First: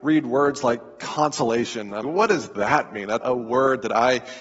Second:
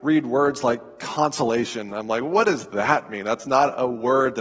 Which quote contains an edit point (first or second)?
first